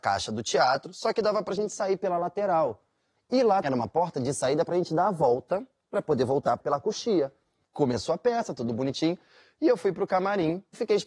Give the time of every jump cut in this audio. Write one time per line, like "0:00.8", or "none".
0:03.6